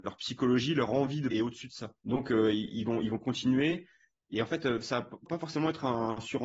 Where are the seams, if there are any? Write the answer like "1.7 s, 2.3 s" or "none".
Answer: 1.3 s, 2.0 s, 5.3 s